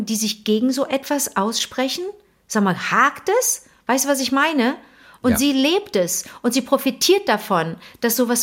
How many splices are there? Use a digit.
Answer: 0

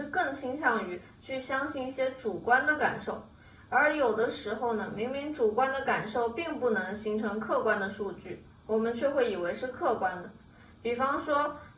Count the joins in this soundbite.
0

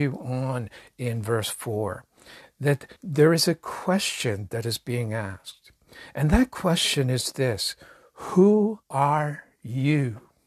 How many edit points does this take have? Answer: 2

